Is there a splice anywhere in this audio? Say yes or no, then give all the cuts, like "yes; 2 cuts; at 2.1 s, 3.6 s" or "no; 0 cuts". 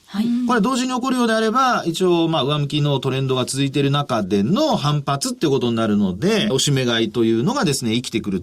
yes; 1 cut; at 6.5 s